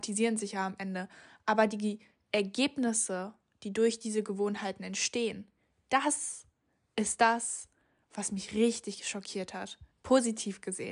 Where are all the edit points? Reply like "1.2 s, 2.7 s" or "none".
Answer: none